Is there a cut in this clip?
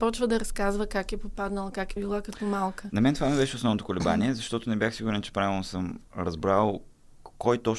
yes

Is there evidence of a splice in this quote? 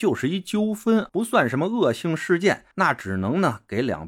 yes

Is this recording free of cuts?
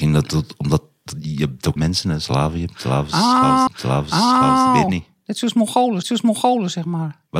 no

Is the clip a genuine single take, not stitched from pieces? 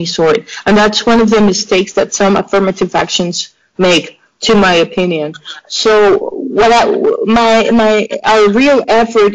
yes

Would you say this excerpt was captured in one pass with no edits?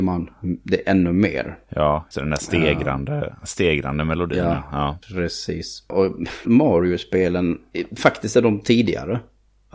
no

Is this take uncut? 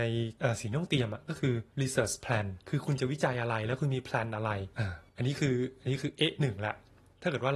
no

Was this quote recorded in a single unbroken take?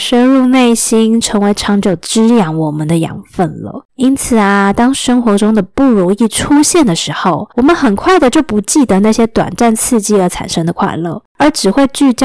no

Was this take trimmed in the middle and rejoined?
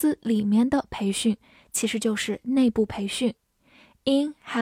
no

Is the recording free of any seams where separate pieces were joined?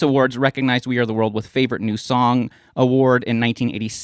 yes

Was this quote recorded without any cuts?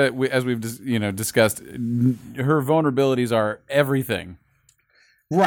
yes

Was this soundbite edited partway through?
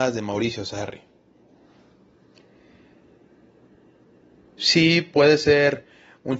no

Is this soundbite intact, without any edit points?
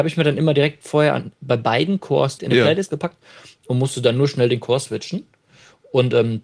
no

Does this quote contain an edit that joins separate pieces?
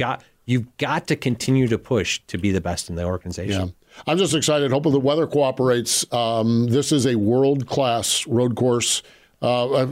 no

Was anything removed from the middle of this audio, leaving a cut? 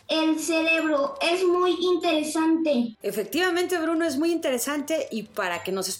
no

